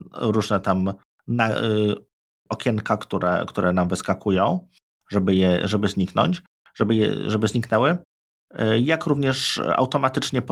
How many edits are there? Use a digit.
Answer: 0